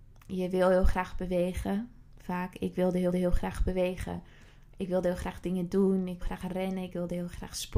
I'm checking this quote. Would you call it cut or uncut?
cut